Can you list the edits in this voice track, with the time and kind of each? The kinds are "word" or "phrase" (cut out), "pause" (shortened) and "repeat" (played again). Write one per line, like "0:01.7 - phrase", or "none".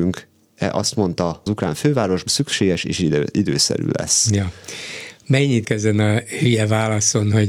0:01.5 - phrase
0:02.3 - word
0:05.6 - word